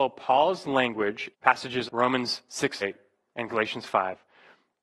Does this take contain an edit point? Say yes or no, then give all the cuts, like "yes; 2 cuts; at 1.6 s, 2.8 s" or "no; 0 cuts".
yes; 3 cuts; at 1.3 s, 1.9 s, 2.8 s